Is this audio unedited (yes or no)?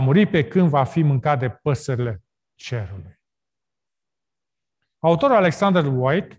yes